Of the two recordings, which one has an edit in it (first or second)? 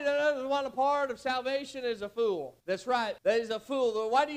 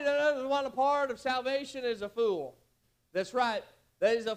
first